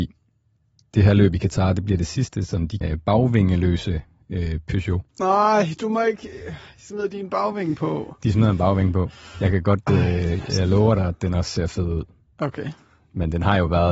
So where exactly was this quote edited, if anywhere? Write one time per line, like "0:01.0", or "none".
0:02.8
0:05.1